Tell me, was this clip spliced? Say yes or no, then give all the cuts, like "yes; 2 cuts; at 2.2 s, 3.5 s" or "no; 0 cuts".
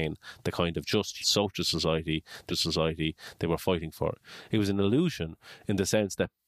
yes; 2 cuts; at 1.2 s, 2.5 s